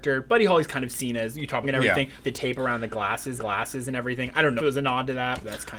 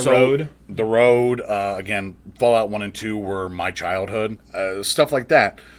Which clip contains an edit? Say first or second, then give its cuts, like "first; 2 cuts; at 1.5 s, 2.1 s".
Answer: first; 4 cuts; at 1.6 s, 2.2 s, 3.4 s, 4.6 s